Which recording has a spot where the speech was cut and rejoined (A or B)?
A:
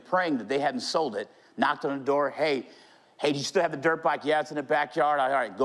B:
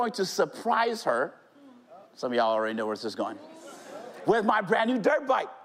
B